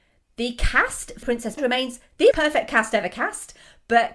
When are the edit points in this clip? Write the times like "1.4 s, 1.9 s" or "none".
1.2 s, 1.6 s, 2.3 s